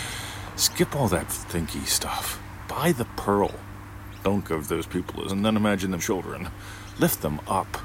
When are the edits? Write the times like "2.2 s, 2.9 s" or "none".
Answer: 1.3 s, 4.4 s, 5.3 s, 6.0 s